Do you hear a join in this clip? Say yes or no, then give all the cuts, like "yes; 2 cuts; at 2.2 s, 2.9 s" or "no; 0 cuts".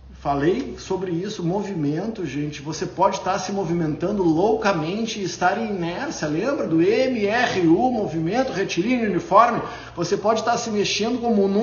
no; 0 cuts